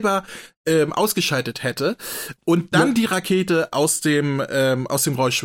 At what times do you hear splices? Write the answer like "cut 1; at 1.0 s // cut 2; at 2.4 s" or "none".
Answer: none